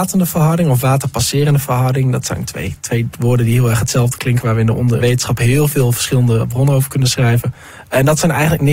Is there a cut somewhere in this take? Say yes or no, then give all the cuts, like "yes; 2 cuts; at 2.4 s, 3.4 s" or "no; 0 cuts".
yes; 1 cut; at 5.0 s